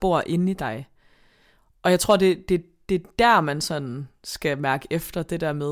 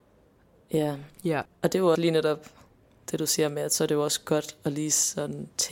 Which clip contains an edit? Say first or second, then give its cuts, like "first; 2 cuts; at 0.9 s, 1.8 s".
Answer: second; 1 cut; at 1.9 s